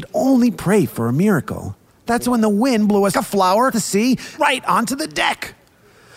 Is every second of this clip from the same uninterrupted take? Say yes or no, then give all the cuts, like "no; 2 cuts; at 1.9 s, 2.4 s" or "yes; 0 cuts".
no; 4 cuts; at 1.9 s, 3.1 s, 3.7 s, 4.4 s